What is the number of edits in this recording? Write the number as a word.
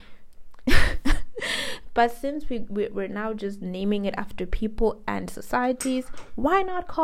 zero